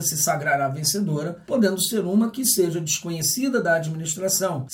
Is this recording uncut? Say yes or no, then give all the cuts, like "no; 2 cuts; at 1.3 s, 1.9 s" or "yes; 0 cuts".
yes; 0 cuts